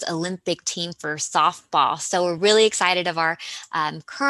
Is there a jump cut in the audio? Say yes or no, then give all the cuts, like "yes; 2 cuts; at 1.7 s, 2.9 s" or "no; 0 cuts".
no; 0 cuts